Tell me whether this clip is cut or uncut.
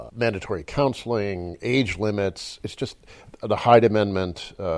uncut